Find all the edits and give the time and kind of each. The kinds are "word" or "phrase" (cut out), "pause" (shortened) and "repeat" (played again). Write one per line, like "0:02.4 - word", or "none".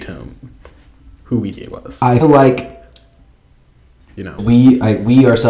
0:01.5 - word
0:02.2 - word
0:04.4 - word